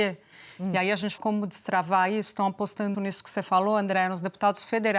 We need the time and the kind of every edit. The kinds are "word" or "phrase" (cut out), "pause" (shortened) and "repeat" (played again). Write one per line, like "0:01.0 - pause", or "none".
0:01.2 - word
0:02.9 - word